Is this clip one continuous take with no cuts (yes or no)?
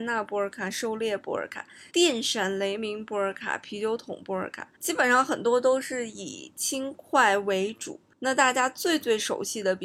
no